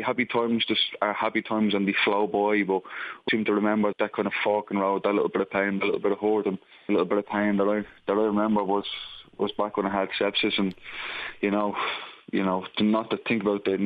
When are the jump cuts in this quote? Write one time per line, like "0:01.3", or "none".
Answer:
0:03.3
0:03.9
0:06.9